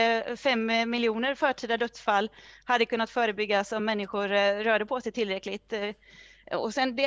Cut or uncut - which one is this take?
uncut